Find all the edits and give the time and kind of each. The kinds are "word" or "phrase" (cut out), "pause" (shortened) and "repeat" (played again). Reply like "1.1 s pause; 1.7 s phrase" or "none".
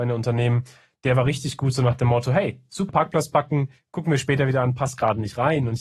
2.9 s phrase

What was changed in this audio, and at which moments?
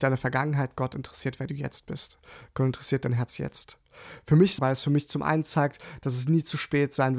4.6 s phrase

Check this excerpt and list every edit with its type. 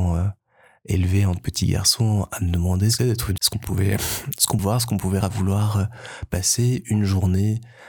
1.4 s word; 3.0 s word; 3.4 s word; 4.6 s word; 5.2 s word

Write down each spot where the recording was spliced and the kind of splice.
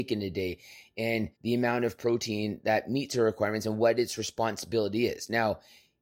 1.4 s pause

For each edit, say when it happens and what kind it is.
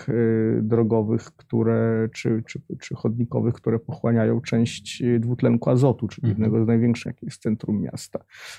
2.1 s word; 7.1 s word

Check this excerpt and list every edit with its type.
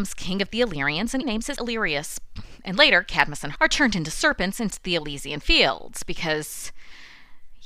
1.2 s word; 1.6 s phrase; 3.6 s word; 4.7 s word

